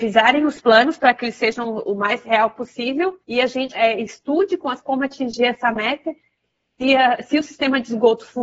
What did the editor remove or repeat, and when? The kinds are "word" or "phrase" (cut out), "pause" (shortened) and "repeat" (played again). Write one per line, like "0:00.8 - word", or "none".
0:03.2 - pause
0:03.7 - word
0:04.8 - word